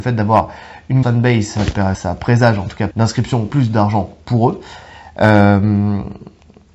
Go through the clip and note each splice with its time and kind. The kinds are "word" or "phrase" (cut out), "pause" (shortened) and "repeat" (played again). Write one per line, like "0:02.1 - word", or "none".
0:01.0 - word
0:01.9 - word
0:02.9 - word
0:03.5 - word